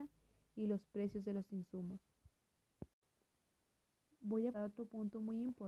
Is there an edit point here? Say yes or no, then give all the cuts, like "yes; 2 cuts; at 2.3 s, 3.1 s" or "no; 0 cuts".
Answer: yes; 1 cut; at 4.5 s